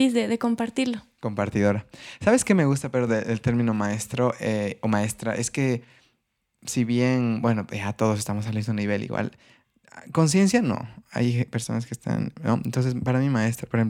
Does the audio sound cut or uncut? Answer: uncut